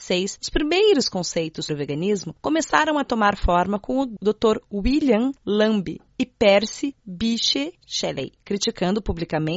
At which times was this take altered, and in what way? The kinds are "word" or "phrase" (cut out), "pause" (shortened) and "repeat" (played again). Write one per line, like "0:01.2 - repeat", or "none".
0:01.7 - word

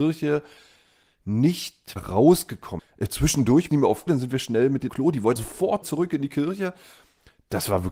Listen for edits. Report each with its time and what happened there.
0:02.0 - word
0:03.7 - word
0:04.1 - word
0:04.9 - word
0:05.4 - word
0:05.8 - word

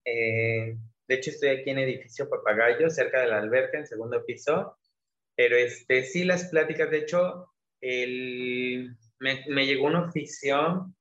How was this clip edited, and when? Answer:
0:01.0 - pause

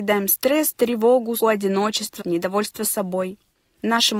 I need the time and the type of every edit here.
0:01.4 - word
0:02.2 - word

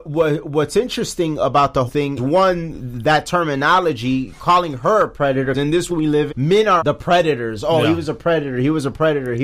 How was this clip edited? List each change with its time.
0:01.9 - word
0:02.2 - word
0:05.5 - word
0:05.9 - word
0:06.3 - word
0:06.8 - word

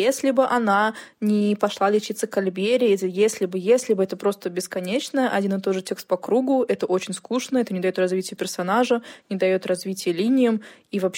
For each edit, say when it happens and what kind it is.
none

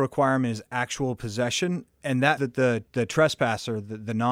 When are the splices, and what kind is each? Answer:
0:02.4 - word
0:02.9 - pause

